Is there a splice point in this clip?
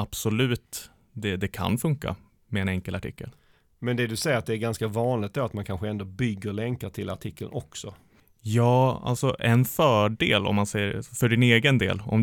no; 0 cuts

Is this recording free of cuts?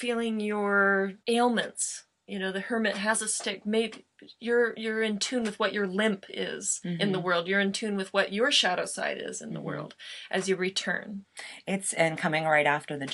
no; 1 cut; at 1.2 s

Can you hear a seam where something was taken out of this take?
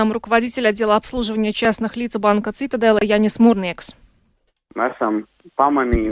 no; 0 cuts

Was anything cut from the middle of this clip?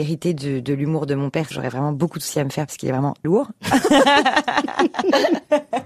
yes; 2 cuts; at 1.5 s, 3.2 s

